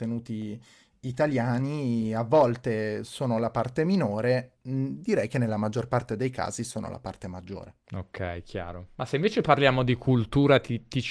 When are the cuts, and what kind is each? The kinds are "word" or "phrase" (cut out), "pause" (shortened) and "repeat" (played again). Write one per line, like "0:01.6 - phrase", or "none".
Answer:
0:04.5 - pause
0:07.8 - pause
0:08.9 - pause